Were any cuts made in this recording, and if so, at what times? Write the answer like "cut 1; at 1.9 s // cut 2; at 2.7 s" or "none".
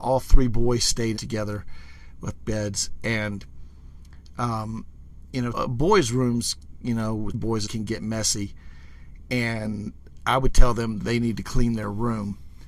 cut 1; at 1.2 s // cut 2; at 2.4 s // cut 3; at 5.5 s // cut 4; at 7.3 s // cut 5; at 7.7 s